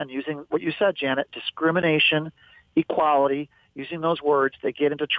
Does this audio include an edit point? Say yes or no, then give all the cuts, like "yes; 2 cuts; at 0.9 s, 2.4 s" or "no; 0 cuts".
no; 0 cuts